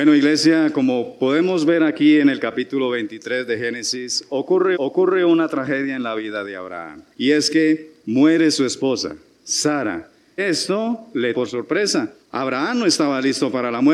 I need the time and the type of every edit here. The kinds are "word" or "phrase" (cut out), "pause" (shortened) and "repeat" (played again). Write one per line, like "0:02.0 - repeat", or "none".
0:04.7 - repeat
0:07.1 - pause
0:10.4 - word
0:11.3 - word
0:12.2 - pause